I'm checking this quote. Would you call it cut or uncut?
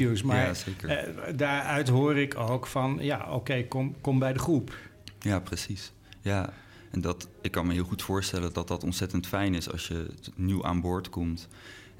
uncut